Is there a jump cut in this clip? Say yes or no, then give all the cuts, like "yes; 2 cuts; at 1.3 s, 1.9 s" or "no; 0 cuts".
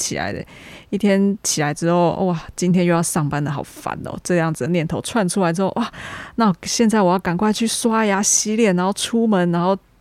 no; 0 cuts